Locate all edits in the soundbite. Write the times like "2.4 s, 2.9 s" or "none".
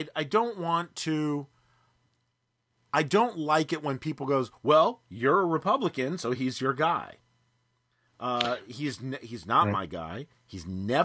none